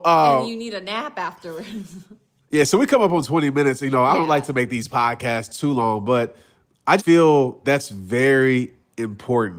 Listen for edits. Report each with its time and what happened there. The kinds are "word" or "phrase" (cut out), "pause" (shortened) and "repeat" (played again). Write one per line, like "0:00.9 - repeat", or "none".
0:07.0 - word
0:07.6 - word